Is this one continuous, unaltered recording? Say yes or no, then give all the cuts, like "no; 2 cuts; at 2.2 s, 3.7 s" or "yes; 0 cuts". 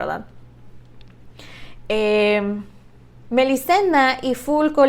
yes; 0 cuts